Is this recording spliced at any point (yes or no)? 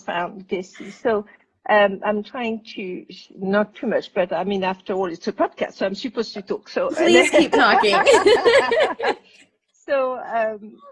yes